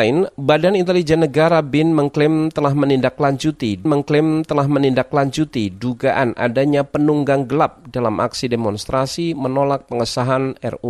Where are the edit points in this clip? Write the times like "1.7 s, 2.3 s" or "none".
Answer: 3.9 s